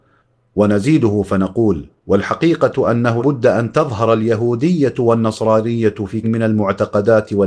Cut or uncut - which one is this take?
cut